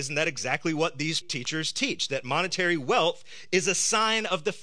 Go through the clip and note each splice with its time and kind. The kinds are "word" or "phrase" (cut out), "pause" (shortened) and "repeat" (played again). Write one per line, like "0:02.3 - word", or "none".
0:01.2 - word